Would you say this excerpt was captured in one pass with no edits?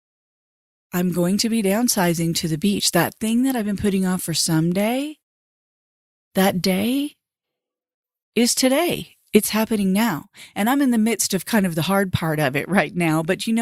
yes; 0 cuts

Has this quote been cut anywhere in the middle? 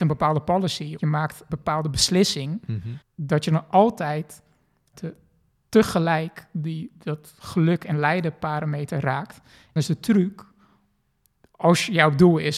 yes; 5 cuts; at 1.0 s, 1.5 s, 3.0 s, 4.9 s, 9.8 s

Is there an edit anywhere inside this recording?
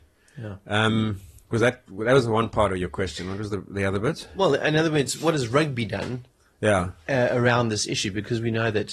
no; 0 cuts

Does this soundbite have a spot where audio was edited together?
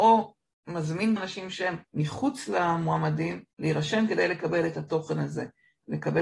yes; 3 cuts; at 1.2 s, 1.8 s, 3.5 s

